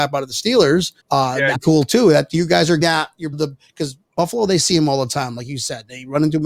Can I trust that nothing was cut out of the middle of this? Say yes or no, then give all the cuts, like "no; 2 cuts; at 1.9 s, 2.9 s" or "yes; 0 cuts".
no; 4 cuts; at 1.0 s, 1.5 s, 2.8 s, 3.3 s